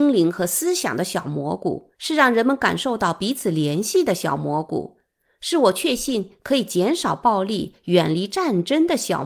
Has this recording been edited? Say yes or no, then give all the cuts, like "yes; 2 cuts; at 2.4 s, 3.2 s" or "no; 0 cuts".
yes; 1 cut; at 1.9 s